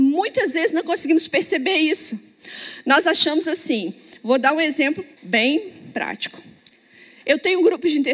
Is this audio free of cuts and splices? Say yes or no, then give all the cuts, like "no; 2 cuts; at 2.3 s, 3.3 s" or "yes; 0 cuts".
no; 1 cut; at 5.2 s